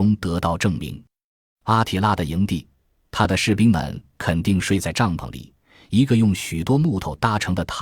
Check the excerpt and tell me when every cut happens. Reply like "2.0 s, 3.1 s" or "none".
none